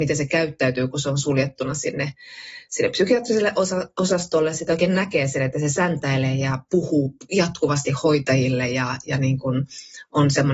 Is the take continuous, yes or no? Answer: yes